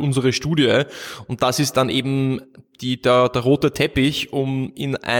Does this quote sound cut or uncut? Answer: uncut